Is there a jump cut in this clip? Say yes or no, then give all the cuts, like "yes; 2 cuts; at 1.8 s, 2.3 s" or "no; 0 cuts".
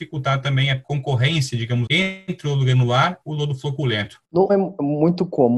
yes; 3 cuts; at 1.9 s, 3.2 s, 4.5 s